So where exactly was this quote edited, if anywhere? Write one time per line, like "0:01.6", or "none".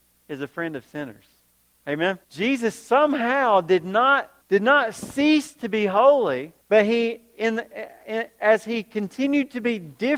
0:02.2
0:04.4
0:06.6

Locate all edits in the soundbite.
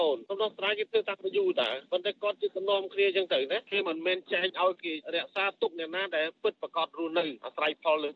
none

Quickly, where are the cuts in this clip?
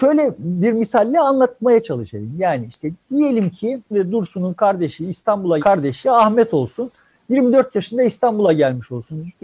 0:03.9
0:05.6

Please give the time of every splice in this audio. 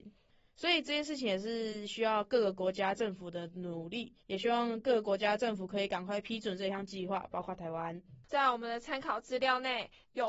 0:04.2
0:08.2

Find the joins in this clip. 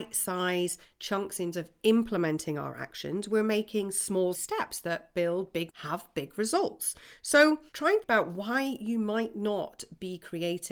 0:01.5
0:04.3
0:05.7
0:07.7
0:08.0

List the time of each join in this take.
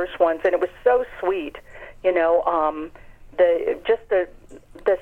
none

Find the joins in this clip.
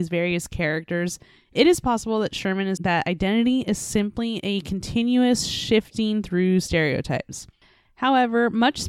0:02.8

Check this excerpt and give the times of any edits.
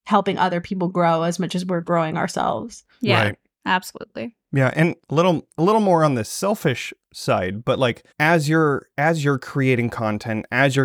0:08.1

